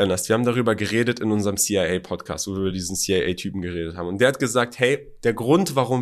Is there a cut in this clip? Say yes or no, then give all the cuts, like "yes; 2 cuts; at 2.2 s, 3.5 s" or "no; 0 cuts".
no; 0 cuts